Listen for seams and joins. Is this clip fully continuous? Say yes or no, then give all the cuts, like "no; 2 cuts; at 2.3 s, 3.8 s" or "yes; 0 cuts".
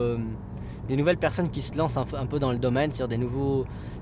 yes; 0 cuts